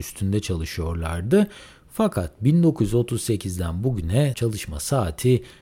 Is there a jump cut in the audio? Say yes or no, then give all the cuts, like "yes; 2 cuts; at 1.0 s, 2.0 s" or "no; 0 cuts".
yes; 1 cut; at 4.3 s